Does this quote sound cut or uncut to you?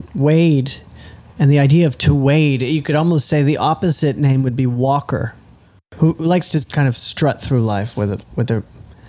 uncut